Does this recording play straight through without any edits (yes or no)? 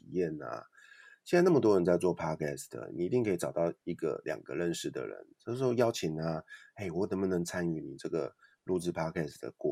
yes